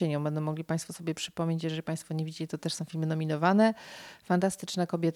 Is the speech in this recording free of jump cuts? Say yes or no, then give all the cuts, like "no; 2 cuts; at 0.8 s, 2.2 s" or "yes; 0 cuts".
yes; 0 cuts